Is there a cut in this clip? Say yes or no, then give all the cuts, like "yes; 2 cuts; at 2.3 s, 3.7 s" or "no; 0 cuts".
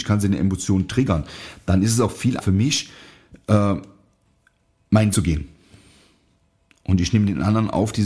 yes; 2 cuts; at 2.4 s, 5.1 s